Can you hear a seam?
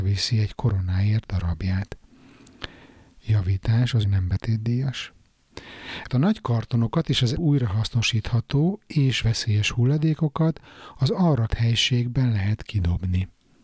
yes; 5 cuts; at 4.0 s, 6.1 s, 7.3 s, 9.2 s, 11.5 s

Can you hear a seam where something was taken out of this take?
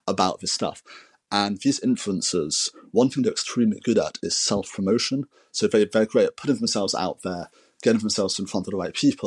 no; 0 cuts

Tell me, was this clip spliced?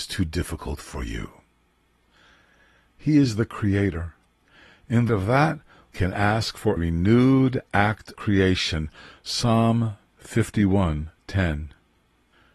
yes; 4 cuts; at 5.1 s, 5.9 s, 6.8 s, 8.1 s

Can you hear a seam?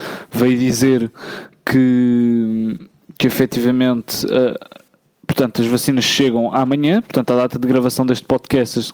no; 0 cuts

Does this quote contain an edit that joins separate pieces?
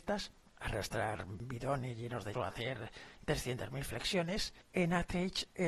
yes; 2 cuts; at 2.3 s, 4.6 s

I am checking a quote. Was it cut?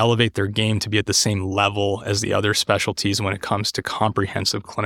no; 0 cuts

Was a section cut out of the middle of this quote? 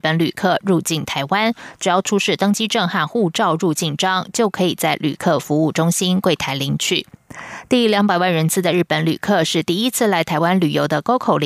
no; 0 cuts

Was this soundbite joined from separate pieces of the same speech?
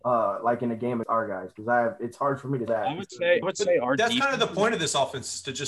yes; 3 cuts; at 1.0 s, 2.7 s, 3.4 s

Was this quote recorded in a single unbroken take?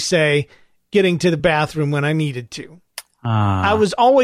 yes; 0 cuts

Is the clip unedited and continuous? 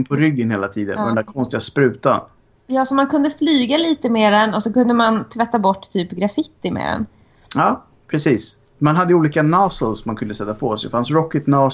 yes; 0 cuts

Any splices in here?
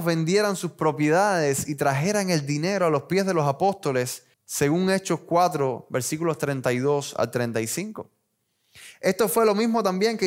no; 0 cuts

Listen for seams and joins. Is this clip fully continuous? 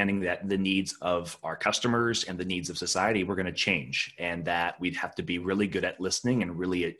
yes; 0 cuts

